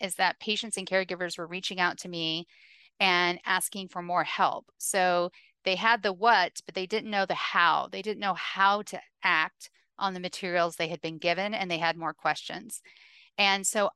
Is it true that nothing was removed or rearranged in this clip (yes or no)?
yes